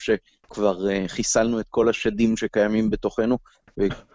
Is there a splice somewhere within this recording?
no; 0 cuts

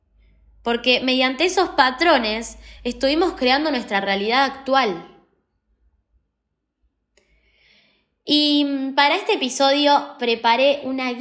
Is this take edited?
no; 0 cuts

